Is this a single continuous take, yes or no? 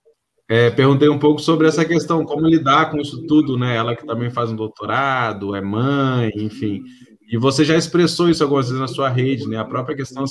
yes